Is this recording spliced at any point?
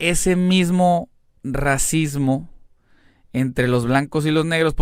no; 0 cuts

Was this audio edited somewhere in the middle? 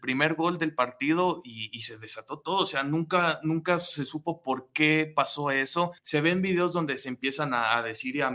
yes; 1 cut; at 6.0 s

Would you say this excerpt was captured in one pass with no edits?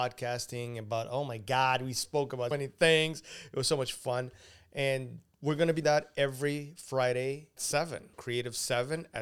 no; 4 cuts; at 2.5 s, 5.8 s, 7.6 s, 8.1 s

